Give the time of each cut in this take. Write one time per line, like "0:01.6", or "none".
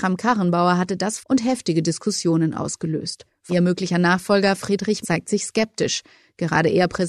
0:01.2
0:03.5
0:05.0